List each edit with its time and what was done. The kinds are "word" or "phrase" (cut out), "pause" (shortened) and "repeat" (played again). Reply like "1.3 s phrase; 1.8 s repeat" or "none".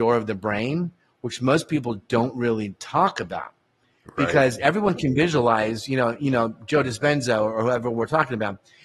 none